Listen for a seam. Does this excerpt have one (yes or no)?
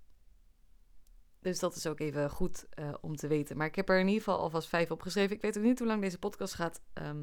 no